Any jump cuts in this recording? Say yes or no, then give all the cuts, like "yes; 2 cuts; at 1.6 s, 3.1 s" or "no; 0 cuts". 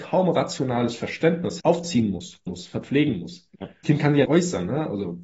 yes; 4 cuts; at 1.6 s, 2.5 s, 3.8 s, 4.3 s